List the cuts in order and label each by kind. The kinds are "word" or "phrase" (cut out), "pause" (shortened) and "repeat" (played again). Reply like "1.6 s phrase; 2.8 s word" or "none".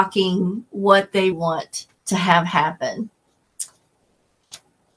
1.3 s word; 2.0 s pause